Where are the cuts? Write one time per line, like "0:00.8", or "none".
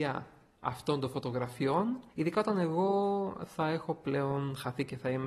0:02.1